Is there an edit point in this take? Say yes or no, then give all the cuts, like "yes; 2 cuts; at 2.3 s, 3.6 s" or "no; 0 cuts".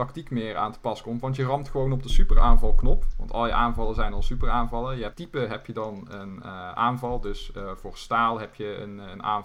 yes; 1 cut; at 5.1 s